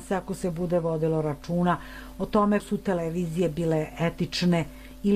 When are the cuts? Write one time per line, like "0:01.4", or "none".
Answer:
0:02.6